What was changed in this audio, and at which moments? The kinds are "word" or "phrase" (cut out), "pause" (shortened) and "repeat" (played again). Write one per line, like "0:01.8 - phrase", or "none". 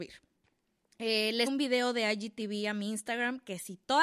0:01.5 - word